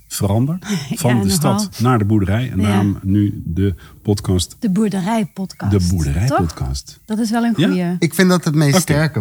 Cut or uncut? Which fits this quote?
uncut